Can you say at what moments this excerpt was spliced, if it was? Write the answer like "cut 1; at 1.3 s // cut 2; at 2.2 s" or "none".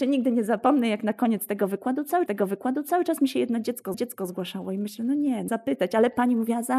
cut 1; at 2.3 s // cut 2; at 3.9 s // cut 3; at 5.5 s

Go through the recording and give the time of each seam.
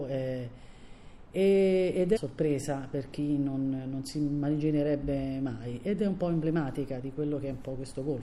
cut 1; at 2.2 s

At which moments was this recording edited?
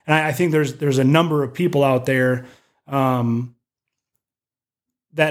none

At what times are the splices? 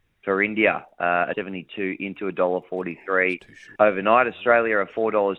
cut 1; at 1.3 s // cut 2; at 3.8 s

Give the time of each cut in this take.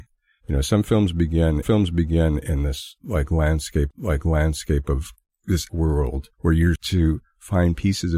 cut 1; at 1.6 s // cut 2; at 3.9 s // cut 3; at 5.7 s // cut 4; at 6.3 s // cut 5; at 6.8 s

